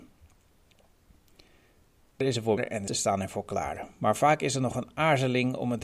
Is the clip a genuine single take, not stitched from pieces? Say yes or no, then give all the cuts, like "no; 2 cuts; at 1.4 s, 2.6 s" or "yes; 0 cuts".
no; 3 cuts; at 2.2 s, 2.6 s, 2.9 s